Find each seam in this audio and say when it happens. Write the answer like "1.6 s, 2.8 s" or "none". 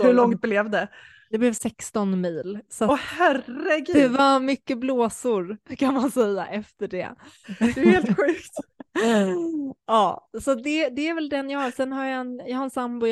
8.9 s